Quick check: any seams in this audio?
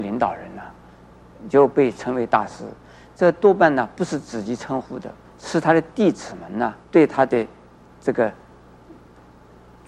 yes; 2 cuts; at 5.2 s, 6.8 s

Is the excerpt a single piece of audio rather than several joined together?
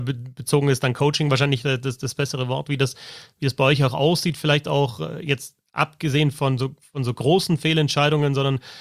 yes; 0 cuts

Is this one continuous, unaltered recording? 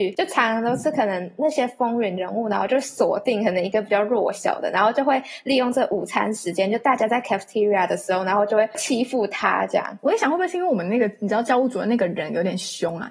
yes; 0 cuts

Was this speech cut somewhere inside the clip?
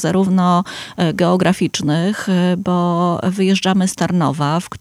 no; 0 cuts

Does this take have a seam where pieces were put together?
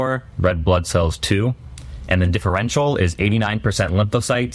no; 0 cuts

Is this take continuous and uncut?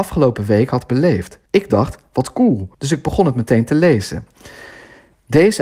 no; 2 cuts; at 1.5 s, 2.7 s

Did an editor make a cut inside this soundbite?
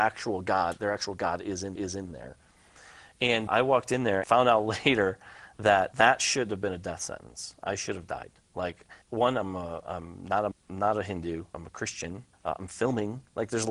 yes; 8 cuts; at 1.8 s, 3.5 s, 4.2 s, 5.9 s, 9.0 s, 10.5 s, 11.5 s, 12.3 s

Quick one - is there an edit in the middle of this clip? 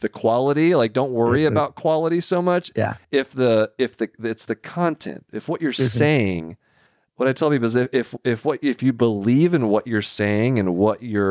no; 0 cuts

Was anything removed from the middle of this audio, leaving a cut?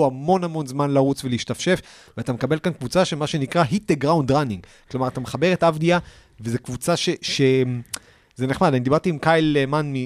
no; 0 cuts

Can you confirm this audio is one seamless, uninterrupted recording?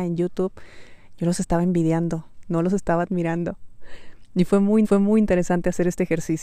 no; 1 cut; at 4.8 s

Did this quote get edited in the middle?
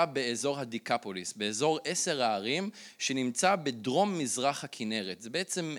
no; 0 cuts

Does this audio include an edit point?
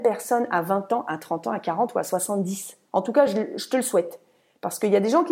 no; 0 cuts

